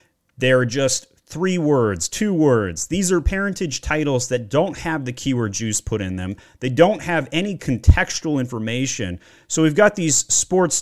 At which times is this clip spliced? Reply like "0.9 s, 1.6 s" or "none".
none